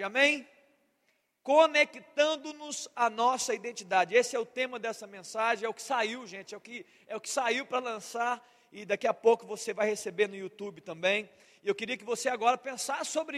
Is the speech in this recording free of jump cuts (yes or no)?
yes